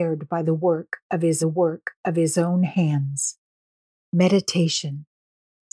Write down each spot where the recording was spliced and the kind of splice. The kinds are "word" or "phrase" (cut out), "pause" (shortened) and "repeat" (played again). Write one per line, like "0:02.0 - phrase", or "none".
0:01.4 - repeat